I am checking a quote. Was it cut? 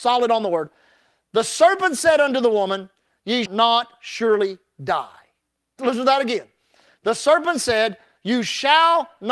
yes; 2 cuts; at 3.5 s, 5.8 s

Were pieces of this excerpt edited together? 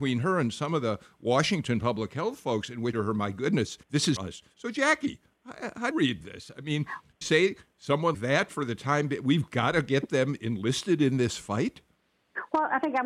yes; 6 cuts; at 2.9 s, 3.8 s, 4.2 s, 5.9 s, 7.2 s, 8.1 s

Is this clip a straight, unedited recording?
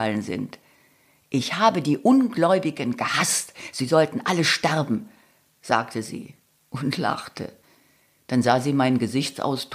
yes; 0 cuts

